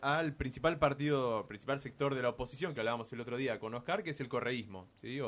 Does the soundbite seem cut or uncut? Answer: uncut